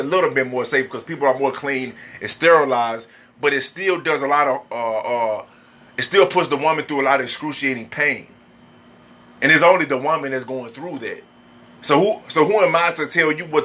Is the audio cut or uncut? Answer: uncut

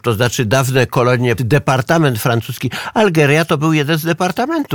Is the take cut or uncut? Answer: cut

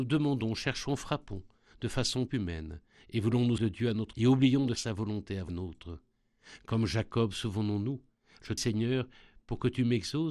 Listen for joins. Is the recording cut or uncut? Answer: cut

